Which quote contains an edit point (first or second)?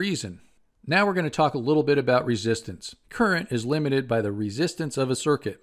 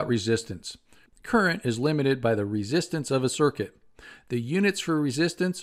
first